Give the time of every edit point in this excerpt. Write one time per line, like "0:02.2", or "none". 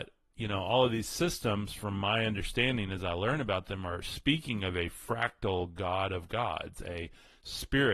none